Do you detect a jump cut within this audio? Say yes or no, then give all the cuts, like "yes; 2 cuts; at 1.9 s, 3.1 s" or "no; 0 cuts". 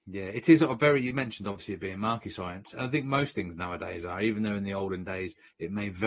no; 0 cuts